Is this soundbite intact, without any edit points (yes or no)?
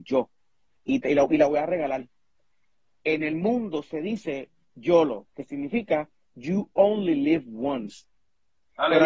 yes